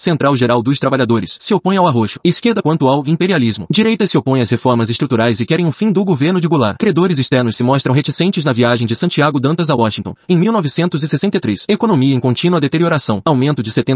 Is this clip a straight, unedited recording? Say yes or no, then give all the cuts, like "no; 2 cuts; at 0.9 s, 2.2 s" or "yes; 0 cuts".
no; 1 cut; at 2.6 s